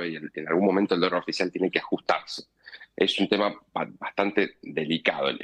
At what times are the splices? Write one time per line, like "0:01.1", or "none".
0:03.7